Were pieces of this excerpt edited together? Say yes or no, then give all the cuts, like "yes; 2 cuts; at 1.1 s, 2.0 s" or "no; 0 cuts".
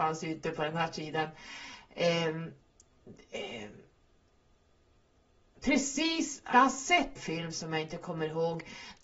yes; 2 cuts; at 6.5 s, 7.2 s